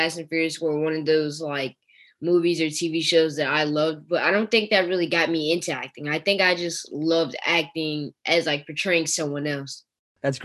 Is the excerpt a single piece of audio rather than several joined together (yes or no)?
yes